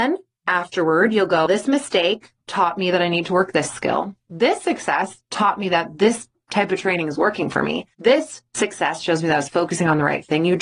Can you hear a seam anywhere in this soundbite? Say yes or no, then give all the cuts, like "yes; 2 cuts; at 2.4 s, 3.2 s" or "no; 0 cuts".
yes; 2 cuts; at 1.5 s, 7.9 s